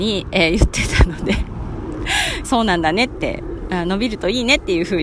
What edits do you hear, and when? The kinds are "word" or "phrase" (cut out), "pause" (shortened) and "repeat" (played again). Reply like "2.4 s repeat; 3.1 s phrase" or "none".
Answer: 2.4 s phrase